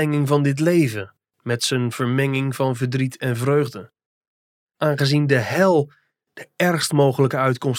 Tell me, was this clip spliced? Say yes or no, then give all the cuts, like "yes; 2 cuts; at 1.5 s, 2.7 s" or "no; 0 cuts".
no; 0 cuts